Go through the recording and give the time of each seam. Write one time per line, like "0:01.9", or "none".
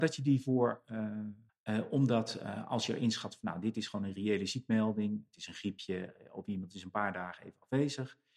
0:01.5